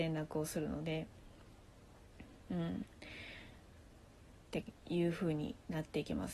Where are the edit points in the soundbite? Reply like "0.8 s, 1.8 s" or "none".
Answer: 4.8 s